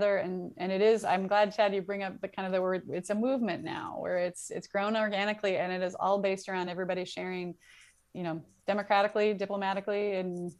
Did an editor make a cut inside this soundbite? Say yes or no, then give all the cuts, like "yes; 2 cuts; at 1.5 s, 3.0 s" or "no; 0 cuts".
no; 0 cuts